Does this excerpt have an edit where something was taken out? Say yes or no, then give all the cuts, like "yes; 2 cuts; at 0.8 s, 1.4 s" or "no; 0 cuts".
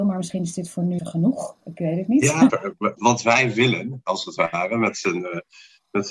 yes; 3 cuts; at 1.0 s, 2.5 s, 3.0 s